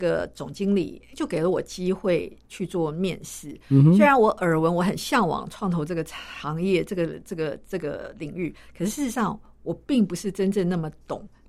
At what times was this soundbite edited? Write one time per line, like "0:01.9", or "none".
0:01.1

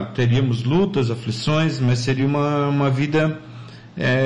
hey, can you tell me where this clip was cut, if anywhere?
none

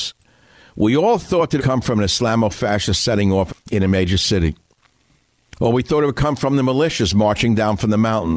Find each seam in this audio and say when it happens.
0:01.6
0:03.5

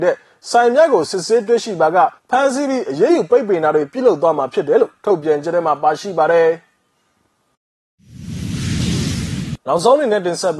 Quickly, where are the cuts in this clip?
0:02.2
0:09.6

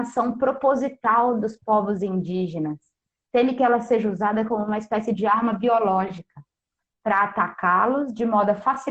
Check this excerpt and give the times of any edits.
none

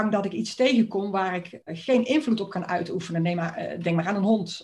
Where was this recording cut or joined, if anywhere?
0:01.6

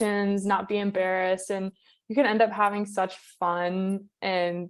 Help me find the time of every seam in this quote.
none

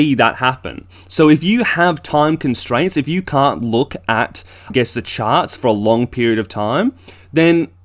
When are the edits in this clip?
0:04.7

